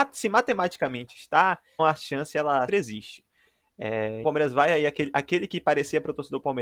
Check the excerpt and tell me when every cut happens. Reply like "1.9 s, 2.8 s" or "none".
1.8 s, 2.7 s, 4.2 s